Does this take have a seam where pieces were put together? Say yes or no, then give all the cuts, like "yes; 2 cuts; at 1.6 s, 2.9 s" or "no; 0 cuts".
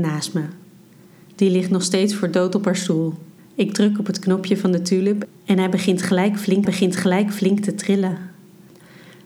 yes; 2 cuts; at 3.4 s, 6.6 s